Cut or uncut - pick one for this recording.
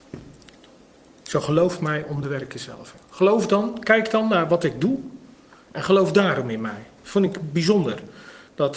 uncut